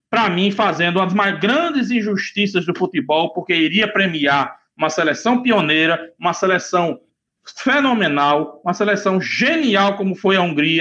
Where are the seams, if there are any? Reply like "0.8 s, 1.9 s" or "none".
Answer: none